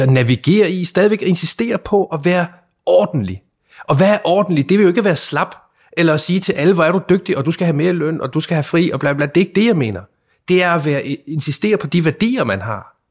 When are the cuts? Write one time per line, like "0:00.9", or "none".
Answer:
none